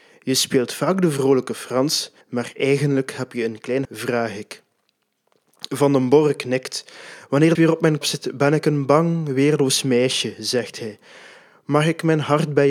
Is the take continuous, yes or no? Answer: no